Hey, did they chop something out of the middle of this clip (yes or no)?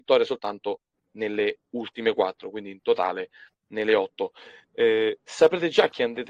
no